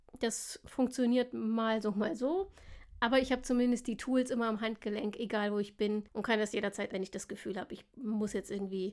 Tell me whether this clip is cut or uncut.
cut